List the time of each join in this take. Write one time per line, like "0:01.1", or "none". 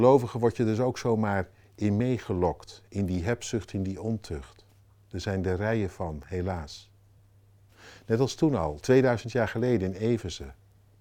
none